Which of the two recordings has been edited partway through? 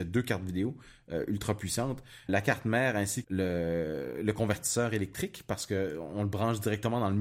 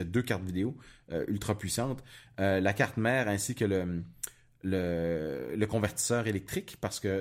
first; 2 cuts; at 2.3 s, 3.2 s

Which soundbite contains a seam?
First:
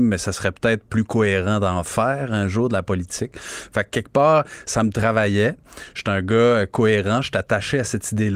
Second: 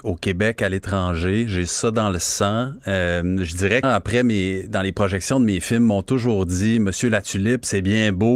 second; 1 cut; at 3.8 s

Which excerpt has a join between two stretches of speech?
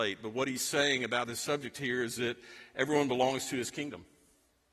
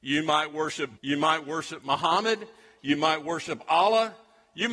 second; 1 cut; at 1.0 s

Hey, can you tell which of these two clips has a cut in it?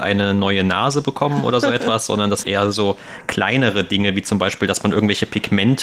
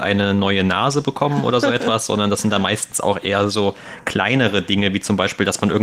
first; 1 cut; at 2.4 s

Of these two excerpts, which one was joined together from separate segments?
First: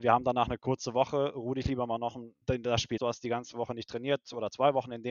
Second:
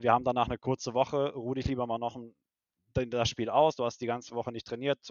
first; 2 cuts; at 2.4 s, 3.0 s

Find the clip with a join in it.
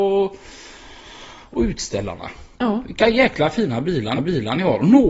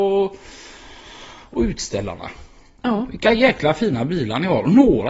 first; 2 cuts; at 2.5 s, 4.2 s

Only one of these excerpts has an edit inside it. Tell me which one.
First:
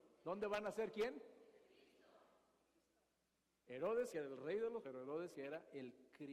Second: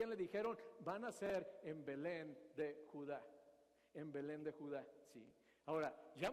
first; 3 cuts; at 4.1 s, 4.8 s, 5.3 s

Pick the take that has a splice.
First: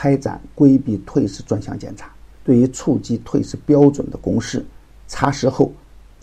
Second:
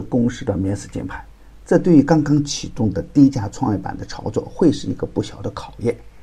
first; 2 cuts; at 2.3 s, 4.8 s

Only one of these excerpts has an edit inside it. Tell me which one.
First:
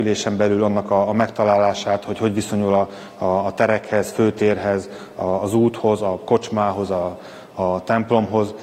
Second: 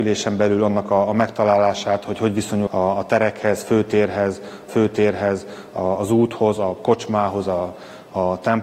second; 2 cuts; at 2.7 s, 4.7 s

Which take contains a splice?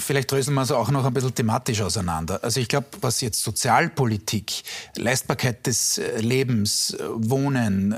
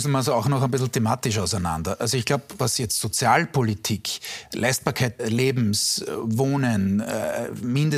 second; 1 cut; at 5.2 s

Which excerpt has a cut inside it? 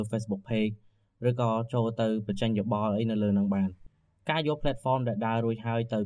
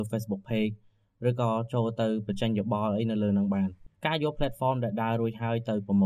second; 1 cut; at 3.9 s

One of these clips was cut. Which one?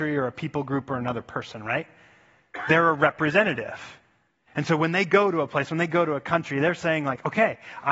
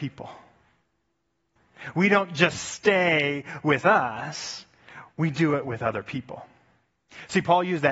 second; 1 cut; at 5.1 s

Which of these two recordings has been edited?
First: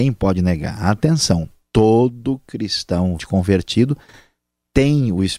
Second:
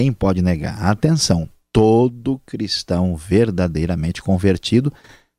first; 1 cut; at 3.2 s

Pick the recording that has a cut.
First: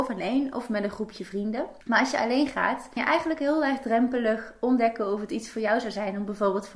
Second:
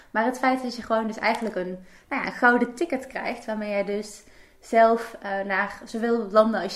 first; 2 cuts; at 1.8 s, 3.0 s

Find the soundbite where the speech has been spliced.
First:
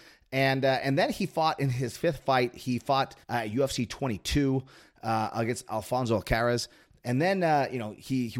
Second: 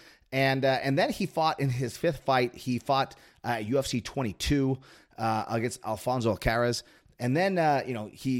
first; 1 cut; at 3.2 s

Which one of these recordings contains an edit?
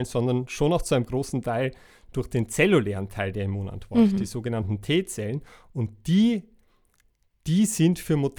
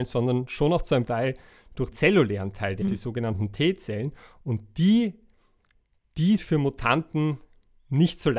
second; 4 cuts; at 1.1 s, 1.9 s, 2.8 s, 6.4 s

